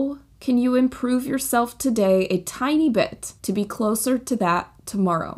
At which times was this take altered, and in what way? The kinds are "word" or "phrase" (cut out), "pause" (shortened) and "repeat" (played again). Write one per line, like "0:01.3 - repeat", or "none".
0:03.4 - pause